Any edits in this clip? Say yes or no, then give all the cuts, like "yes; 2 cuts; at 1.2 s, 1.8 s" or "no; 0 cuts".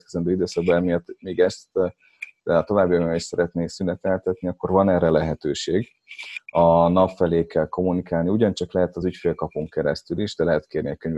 no; 0 cuts